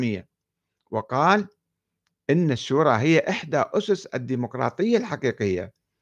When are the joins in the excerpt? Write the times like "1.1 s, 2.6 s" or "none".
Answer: none